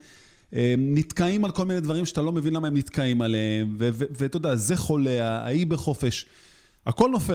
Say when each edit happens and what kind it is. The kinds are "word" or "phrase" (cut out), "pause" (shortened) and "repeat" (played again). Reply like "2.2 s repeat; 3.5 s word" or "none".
none